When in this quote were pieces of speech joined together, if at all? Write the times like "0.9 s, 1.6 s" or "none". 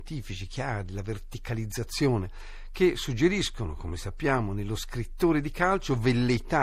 none

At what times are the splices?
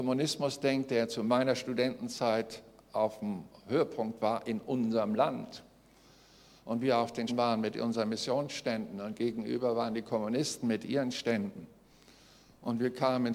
7.3 s

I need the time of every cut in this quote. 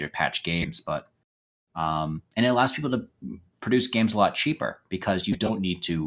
none

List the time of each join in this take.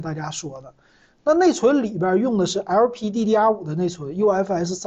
none

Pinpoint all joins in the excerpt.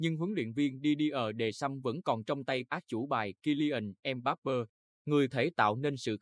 2.6 s, 5.3 s

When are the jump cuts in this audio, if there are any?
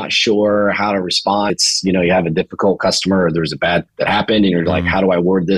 1.5 s, 3.9 s

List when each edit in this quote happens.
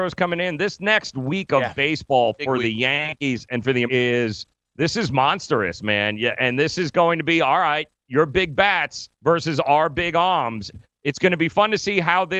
3.9 s, 9.1 s, 10.7 s

